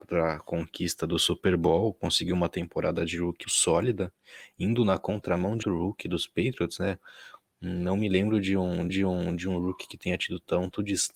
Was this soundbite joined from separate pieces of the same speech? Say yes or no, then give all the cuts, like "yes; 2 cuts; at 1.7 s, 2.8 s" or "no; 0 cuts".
yes; 3 cuts; at 3.4 s, 5.6 s, 8.9 s